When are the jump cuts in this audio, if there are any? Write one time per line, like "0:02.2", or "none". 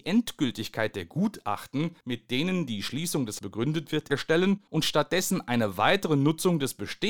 0:02.0
0:03.4
0:04.1
0:04.7